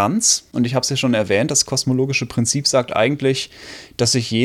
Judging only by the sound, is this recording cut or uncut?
uncut